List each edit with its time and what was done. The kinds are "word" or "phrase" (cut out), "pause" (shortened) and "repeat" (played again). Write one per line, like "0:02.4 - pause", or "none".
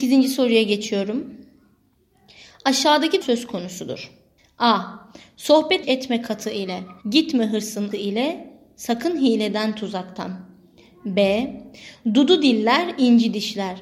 0:03.2 - phrase
0:04.4 - pause
0:05.8 - phrase
0:07.0 - pause
0:07.9 - word